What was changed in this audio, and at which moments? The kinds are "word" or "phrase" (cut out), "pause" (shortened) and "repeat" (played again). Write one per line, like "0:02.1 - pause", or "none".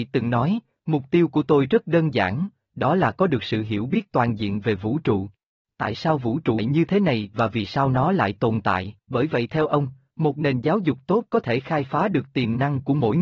0:05.6 - pause
0:06.6 - word
0:09.0 - pause